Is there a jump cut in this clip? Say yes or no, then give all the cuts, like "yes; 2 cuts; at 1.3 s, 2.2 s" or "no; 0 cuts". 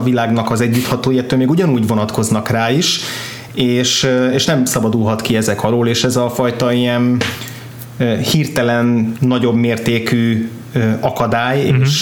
no; 0 cuts